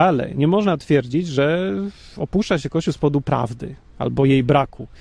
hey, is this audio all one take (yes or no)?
yes